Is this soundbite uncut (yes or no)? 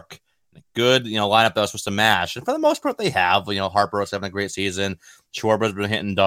yes